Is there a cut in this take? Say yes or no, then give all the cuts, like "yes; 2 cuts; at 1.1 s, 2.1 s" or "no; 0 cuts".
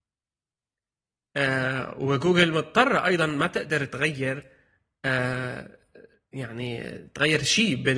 no; 0 cuts